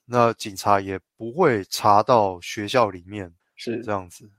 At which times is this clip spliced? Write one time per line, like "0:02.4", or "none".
0:01.1
0:03.4